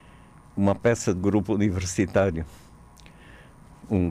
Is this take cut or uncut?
cut